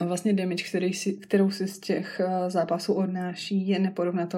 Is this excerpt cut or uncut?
uncut